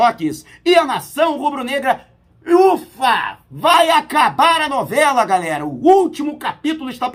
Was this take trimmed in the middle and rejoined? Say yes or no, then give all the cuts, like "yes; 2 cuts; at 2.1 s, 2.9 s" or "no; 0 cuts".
no; 0 cuts